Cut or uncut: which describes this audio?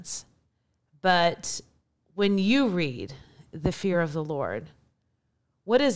uncut